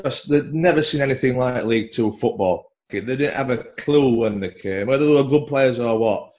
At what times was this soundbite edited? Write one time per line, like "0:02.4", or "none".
none